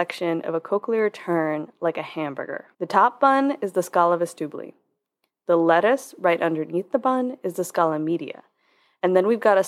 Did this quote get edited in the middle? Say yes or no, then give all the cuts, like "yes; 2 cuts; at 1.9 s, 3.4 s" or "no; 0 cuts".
yes; 1 cut; at 2.7 s